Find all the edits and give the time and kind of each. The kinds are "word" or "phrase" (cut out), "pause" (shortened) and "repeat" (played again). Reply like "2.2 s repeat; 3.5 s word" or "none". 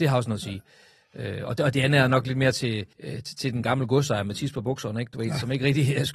2.9 s pause